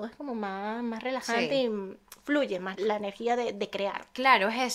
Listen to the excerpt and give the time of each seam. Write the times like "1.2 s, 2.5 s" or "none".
2.7 s